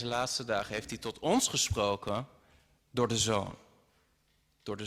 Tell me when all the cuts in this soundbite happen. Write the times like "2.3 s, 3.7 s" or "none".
none